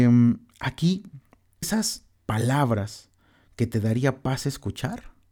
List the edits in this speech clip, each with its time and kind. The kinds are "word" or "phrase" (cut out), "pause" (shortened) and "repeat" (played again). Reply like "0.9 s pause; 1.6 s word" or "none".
1.6 s word; 2.2 s word